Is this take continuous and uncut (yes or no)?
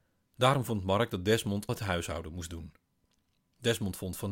no